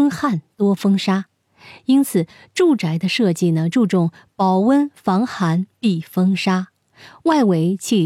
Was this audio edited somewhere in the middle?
no; 0 cuts

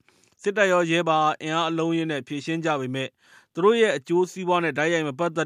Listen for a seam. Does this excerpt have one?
no; 0 cuts

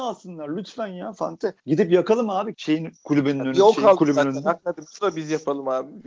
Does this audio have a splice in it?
yes; 4 cuts; at 1.6 s, 2.5 s, 3.0 s, 5.0 s

